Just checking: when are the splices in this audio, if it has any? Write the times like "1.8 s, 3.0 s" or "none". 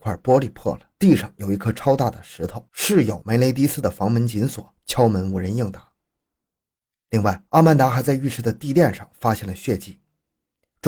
0.9 s, 2.7 s, 7.5 s